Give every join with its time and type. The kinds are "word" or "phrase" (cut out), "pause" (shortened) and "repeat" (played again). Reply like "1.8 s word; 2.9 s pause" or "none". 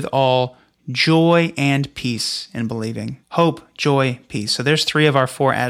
3.2 s pause